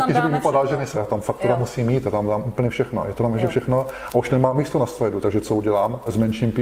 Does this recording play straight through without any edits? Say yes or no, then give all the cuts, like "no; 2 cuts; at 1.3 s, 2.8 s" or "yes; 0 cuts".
no; 1 cut; at 0.9 s